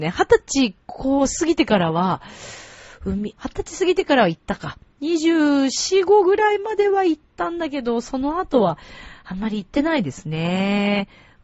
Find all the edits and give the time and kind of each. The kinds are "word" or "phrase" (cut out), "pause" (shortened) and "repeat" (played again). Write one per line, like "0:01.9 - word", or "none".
0:03.4 - word